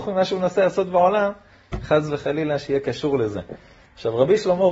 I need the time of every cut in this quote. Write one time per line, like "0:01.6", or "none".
none